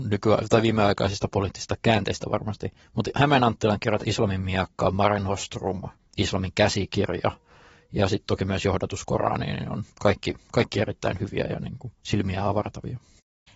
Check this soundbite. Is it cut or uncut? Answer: cut